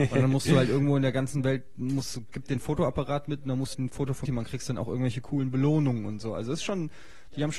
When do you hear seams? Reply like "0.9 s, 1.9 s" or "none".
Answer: 3.7 s, 4.2 s